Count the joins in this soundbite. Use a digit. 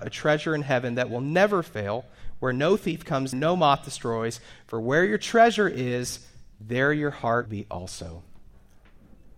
3